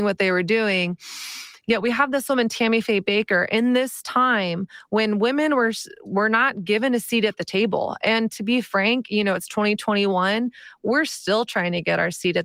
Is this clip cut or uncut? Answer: uncut